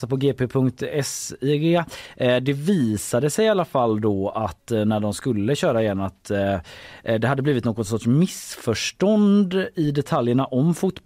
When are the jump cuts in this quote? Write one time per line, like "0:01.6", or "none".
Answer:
none